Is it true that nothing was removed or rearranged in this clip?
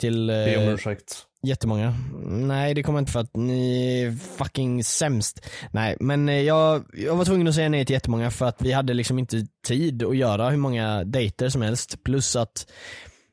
no; 1 cut; at 3.1 s

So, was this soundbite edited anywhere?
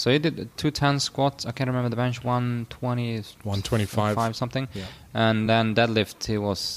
no; 0 cuts

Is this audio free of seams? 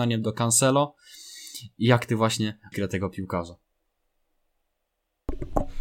no; 1 cut; at 2.7 s

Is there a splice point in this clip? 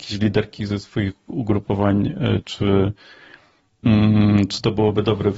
no; 0 cuts

